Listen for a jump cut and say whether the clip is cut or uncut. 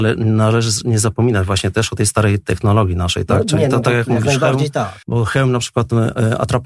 cut